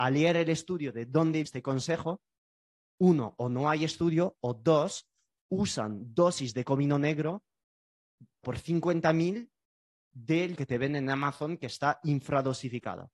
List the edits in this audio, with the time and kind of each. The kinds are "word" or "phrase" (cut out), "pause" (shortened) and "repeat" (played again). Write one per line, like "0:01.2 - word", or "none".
0:01.5 - word
0:08.4 - word
0:10.6 - word